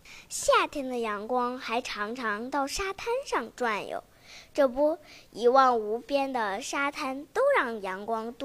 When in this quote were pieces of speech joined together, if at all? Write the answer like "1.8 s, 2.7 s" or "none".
none